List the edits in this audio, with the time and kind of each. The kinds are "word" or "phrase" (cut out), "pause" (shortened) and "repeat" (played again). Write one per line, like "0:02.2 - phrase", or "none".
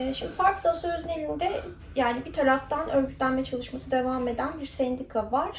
none